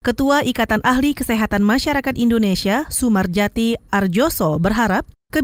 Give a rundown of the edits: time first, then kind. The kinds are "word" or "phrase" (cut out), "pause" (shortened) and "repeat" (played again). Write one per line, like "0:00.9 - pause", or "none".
none